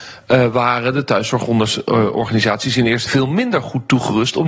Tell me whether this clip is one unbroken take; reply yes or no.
no